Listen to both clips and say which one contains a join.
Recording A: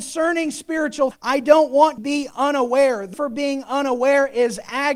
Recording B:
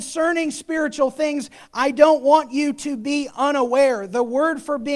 A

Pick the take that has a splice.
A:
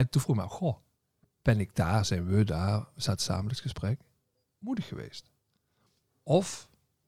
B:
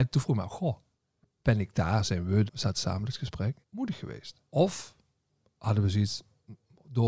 B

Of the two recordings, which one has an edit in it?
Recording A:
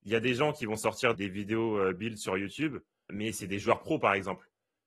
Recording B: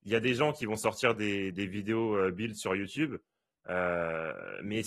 A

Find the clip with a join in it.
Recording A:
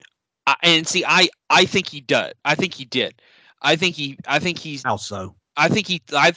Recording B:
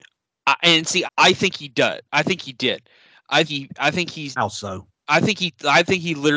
B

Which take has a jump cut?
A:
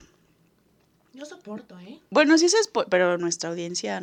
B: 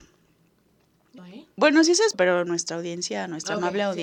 B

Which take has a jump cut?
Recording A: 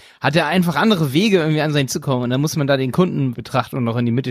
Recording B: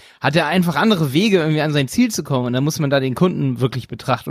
A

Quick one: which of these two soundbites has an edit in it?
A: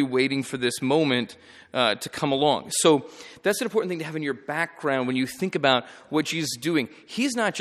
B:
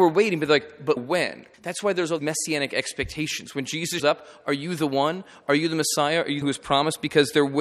B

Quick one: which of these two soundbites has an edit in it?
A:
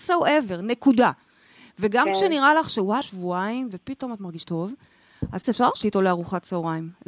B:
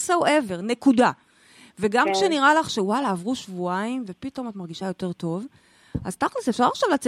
A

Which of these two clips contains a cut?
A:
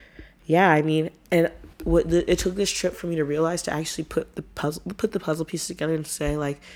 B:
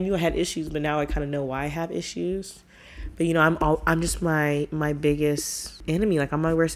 A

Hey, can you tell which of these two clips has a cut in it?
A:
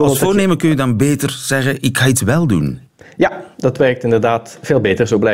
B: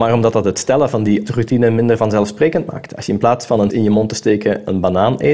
B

